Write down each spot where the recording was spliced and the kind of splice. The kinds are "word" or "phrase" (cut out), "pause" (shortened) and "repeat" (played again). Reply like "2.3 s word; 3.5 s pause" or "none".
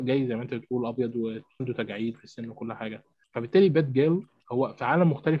2.1 s word; 3.2 s pause